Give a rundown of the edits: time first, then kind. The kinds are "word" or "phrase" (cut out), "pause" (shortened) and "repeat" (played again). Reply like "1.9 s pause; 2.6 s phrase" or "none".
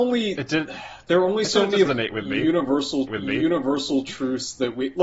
1.8 s word; 3.1 s repeat